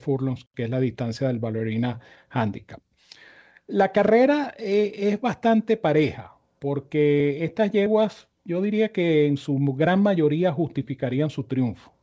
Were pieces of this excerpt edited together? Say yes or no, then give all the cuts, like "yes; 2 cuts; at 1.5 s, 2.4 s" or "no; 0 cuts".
no; 0 cuts